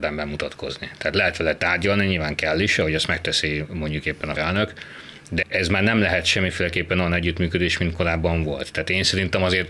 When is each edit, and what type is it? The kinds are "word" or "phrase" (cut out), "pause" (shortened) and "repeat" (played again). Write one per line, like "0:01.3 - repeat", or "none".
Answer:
0:04.4 - word
0:05.4 - word